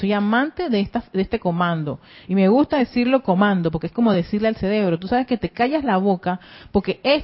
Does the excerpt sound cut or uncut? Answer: uncut